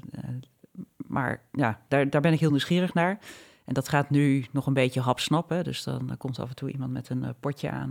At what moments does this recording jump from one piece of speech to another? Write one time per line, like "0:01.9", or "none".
none